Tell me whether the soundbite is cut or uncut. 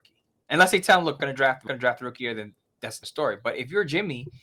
cut